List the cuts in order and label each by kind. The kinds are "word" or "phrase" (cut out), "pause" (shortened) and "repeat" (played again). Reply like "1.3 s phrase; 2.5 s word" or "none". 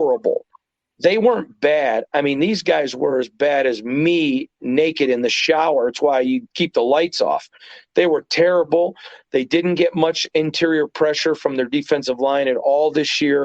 none